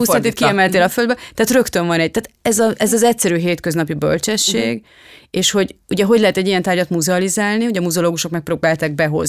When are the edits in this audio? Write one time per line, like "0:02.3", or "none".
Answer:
none